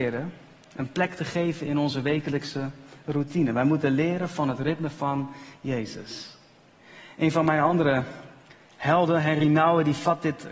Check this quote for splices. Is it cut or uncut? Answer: uncut